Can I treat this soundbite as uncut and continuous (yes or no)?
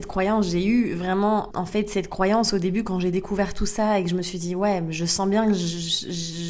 no